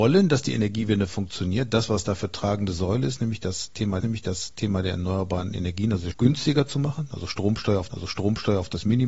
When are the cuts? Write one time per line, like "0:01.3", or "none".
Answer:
0:04.0
0:06.1
0:07.9